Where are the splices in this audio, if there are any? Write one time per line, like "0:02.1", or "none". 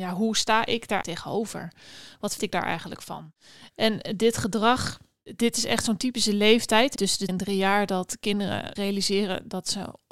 0:01.0
0:02.4
0:07.0
0:07.3
0:08.8